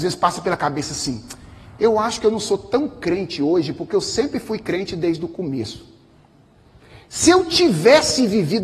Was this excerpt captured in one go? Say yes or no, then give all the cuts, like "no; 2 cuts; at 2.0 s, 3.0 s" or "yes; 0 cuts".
yes; 0 cuts